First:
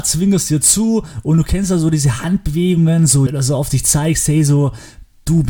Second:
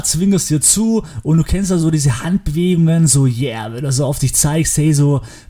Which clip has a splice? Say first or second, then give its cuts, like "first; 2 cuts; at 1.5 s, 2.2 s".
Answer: first; 1 cut; at 3.3 s